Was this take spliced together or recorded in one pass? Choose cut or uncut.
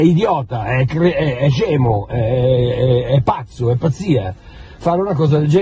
uncut